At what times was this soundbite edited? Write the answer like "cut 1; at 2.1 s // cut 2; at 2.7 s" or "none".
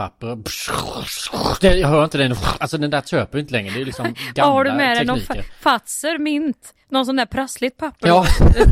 none